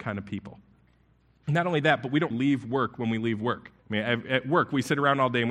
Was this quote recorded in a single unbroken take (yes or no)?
no